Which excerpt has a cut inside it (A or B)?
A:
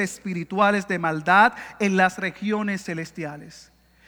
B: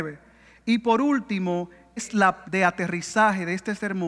B